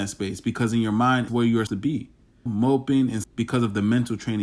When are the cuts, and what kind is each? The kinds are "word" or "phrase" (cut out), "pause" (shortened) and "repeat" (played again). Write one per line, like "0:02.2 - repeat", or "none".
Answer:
0:01.3 - word
0:01.7 - word
0:02.5 - word
0:03.2 - word